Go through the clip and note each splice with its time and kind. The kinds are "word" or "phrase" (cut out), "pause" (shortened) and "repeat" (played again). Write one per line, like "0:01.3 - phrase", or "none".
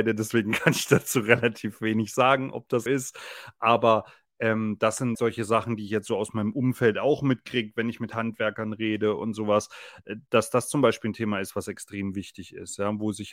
0:02.9 - word
0:05.1 - word